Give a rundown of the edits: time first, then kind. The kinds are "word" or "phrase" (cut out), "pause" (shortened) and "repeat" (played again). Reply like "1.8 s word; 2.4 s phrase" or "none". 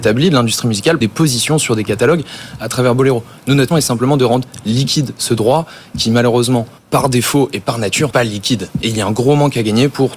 1.0 s word; 3.7 s word; 6.8 s pause; 8.1 s word